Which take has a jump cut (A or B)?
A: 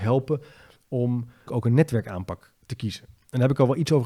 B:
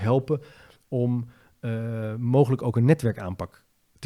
A